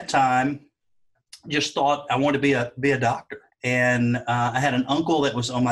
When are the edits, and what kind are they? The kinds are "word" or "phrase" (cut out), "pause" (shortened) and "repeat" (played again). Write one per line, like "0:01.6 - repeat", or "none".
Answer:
0:03.5 - pause